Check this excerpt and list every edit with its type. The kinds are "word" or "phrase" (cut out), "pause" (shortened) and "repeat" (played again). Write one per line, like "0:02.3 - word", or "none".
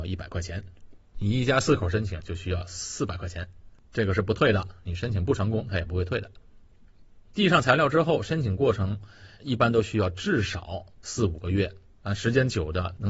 0:07.2 - pause
0:10.9 - pause
0:11.9 - pause